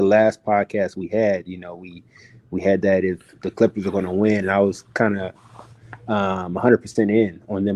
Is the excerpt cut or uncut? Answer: uncut